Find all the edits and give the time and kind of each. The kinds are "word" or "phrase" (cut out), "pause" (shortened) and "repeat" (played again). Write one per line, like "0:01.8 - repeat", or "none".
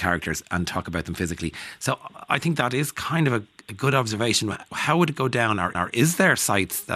0:03.6 - word
0:05.7 - repeat